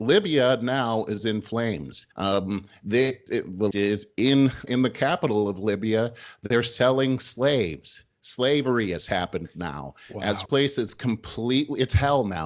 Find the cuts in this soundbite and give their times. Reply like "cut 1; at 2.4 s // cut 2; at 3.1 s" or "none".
cut 1; at 2.1 s // cut 2; at 3.3 s // cut 3; at 3.7 s // cut 4; at 4.7 s // cut 5; at 10.4 s